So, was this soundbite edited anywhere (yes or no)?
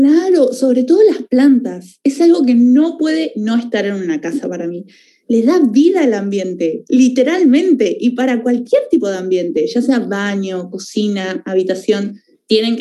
no